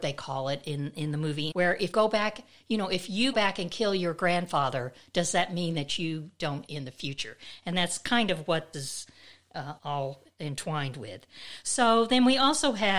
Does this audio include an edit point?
yes; 6 cuts; at 1.5 s, 1.9 s, 3.3 s, 6.7 s, 8.7 s, 9.8 s

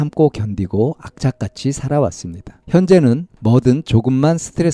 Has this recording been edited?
yes; 1 cut; at 2.6 s

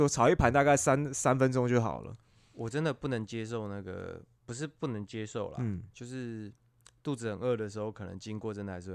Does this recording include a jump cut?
no; 0 cuts

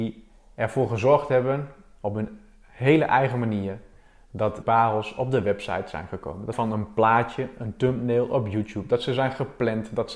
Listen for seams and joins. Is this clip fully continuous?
no; 2 cuts; at 4.6 s, 6.5 s

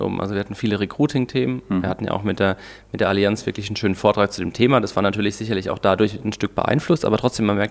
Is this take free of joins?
yes; 0 cuts

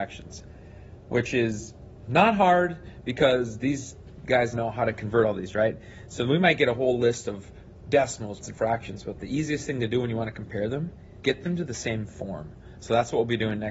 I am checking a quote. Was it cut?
yes; 4 cuts; at 2.0 s, 4.5 s, 8.4 s, 11.2 s

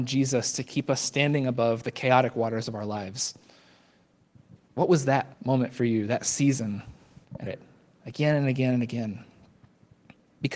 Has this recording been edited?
yes; 2 cuts; at 5.3 s, 7.5 s

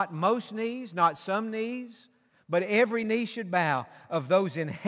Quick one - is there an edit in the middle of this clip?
no; 0 cuts

